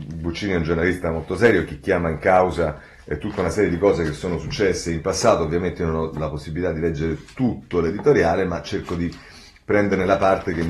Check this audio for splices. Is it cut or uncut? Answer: uncut